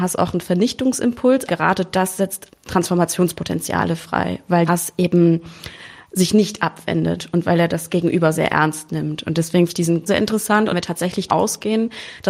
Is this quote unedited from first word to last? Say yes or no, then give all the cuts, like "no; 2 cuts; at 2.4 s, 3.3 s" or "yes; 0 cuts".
no; 8 cuts; at 1.5 s, 2.5 s, 4.7 s, 8.3 s, 9.7 s, 10.1 s, 10.7 s, 11.3 s